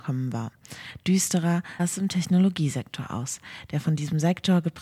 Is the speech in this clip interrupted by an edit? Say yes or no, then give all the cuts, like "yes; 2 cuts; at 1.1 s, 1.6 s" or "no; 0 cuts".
yes; 1 cut; at 1.8 s